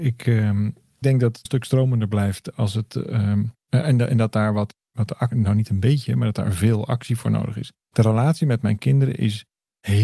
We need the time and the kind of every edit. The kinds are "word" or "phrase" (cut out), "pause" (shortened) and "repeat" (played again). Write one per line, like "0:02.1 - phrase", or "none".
0:01.0 - word
0:01.5 - phrase
0:03.6 - pause
0:07.8 - pause